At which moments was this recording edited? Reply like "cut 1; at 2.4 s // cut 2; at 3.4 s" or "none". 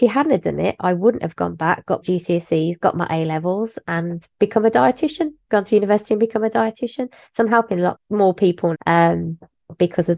cut 1; at 2.0 s // cut 2; at 7.9 s // cut 3; at 8.7 s